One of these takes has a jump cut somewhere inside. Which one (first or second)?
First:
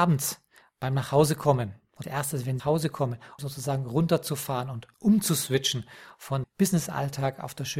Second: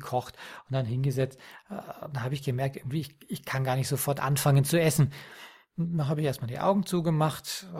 first